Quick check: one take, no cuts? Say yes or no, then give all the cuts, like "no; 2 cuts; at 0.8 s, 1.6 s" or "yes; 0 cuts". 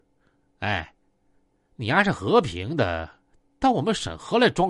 yes; 0 cuts